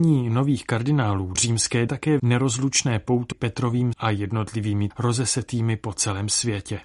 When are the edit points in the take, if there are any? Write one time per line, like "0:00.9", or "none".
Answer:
0:01.3
0:01.9
0:02.2
0:03.3
0:03.9
0:04.9